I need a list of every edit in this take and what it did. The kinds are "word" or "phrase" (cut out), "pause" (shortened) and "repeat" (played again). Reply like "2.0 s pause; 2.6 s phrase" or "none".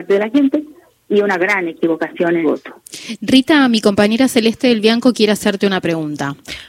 2.4 s word